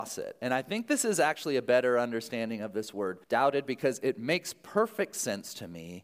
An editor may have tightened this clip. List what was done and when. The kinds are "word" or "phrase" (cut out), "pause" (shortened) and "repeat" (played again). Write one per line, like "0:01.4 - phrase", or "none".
0:03.2 - pause